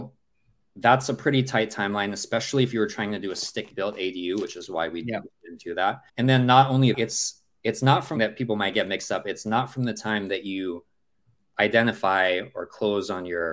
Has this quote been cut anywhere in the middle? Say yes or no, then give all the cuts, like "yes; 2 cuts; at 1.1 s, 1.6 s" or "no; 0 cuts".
yes; 3 cuts; at 6.1 s, 6.9 s, 8.2 s